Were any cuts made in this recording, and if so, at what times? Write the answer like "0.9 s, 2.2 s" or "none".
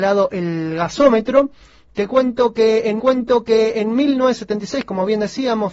3.0 s